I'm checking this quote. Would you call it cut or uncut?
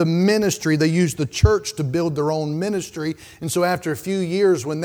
uncut